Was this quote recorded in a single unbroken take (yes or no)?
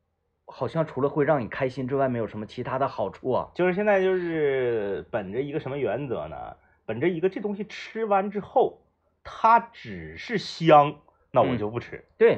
yes